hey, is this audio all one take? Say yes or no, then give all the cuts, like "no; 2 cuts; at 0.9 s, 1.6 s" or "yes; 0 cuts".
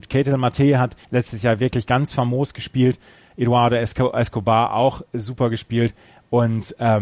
no; 1 cut; at 1.0 s